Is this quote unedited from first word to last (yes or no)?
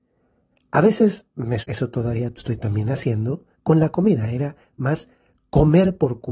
no